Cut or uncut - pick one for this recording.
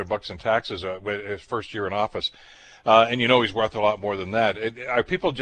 uncut